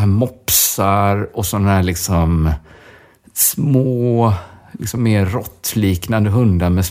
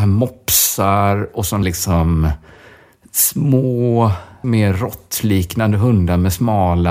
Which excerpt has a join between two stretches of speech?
second; 2 cuts; at 1.6 s, 4.4 s

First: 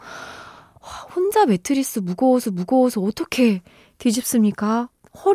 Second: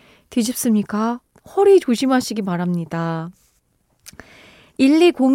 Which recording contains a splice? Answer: first; 1 cut; at 2.4 s

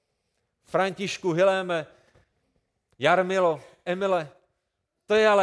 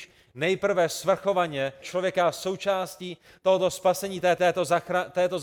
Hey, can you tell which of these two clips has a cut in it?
second; 2 cuts; at 1.8 s, 4.4 s

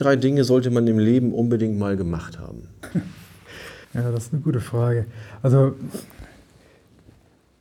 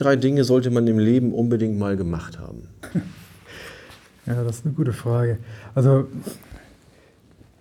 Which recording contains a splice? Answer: first; 1 cut; at 3.8 s

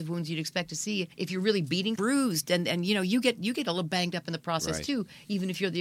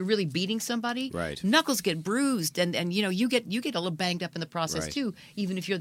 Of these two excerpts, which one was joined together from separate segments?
first; 2 cuts; at 1.1 s, 2.0 s

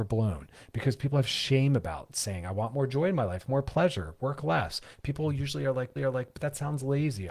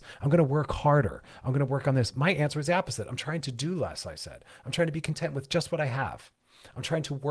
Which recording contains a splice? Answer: first; 1 cut; at 6.0 s

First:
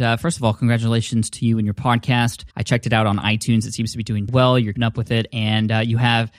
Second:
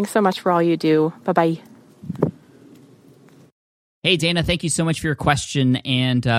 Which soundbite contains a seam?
first; 3 cuts; at 2.5 s, 4.3 s, 4.8 s

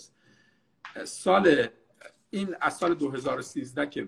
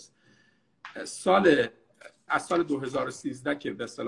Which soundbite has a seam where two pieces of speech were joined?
second; 1 cut; at 2.3 s

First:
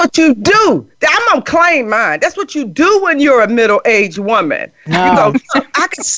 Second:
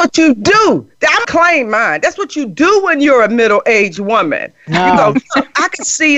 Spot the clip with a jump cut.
second; 1 cut; at 1.2 s

